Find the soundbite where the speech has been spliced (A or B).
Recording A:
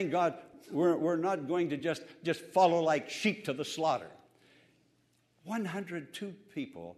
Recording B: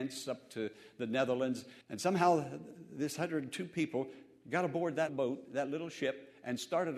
B